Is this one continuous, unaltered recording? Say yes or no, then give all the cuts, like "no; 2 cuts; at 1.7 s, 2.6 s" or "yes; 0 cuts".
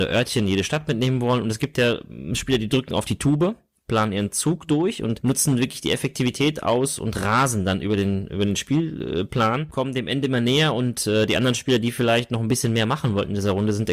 yes; 0 cuts